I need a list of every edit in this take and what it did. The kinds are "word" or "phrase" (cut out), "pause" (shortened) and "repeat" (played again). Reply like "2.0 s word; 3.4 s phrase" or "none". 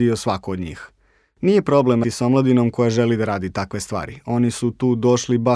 2.0 s word